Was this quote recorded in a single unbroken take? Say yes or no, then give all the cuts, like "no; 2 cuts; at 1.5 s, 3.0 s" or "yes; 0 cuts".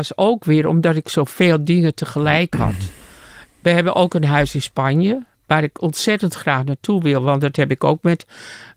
yes; 0 cuts